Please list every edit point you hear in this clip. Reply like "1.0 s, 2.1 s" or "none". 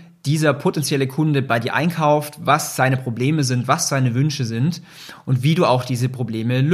none